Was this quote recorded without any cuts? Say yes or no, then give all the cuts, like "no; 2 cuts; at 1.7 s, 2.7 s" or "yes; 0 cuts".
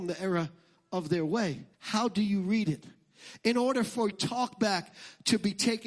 no; 2 cuts; at 1.7 s, 4.1 s